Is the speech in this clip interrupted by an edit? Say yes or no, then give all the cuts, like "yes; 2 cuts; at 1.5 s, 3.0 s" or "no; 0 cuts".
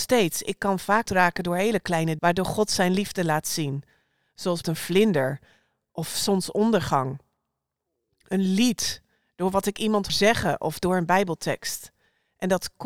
yes; 4 cuts; at 1.1 s, 2.2 s, 4.6 s, 10.1 s